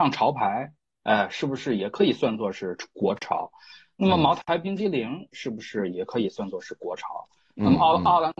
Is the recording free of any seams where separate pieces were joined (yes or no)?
yes